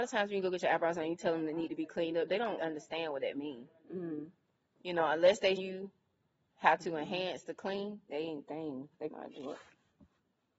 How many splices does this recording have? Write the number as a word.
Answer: four